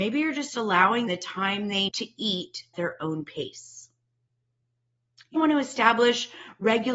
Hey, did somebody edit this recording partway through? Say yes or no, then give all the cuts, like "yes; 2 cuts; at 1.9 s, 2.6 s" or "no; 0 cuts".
yes; 4 cuts; at 1.1 s, 1.9 s, 2.7 s, 5.4 s